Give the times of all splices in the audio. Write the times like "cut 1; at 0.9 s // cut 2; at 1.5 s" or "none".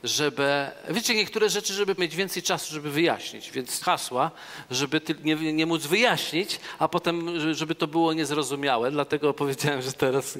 cut 1; at 2.0 s // cut 2; at 3.8 s